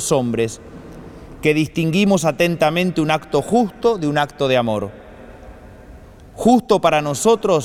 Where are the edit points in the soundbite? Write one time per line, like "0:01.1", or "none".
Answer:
none